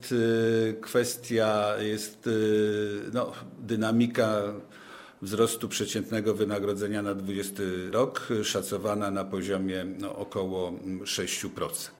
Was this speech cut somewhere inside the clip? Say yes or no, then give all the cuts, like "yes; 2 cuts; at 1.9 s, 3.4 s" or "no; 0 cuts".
no; 0 cuts